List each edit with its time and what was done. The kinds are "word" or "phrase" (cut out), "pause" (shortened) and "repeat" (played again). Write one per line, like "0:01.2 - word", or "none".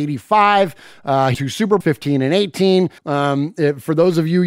0:01.3 - word
0:01.8 - word
0:03.0 - pause